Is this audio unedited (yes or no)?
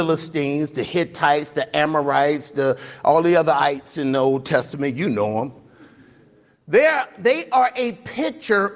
yes